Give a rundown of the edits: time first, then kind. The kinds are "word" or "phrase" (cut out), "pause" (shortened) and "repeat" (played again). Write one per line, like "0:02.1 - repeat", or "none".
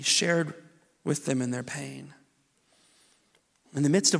none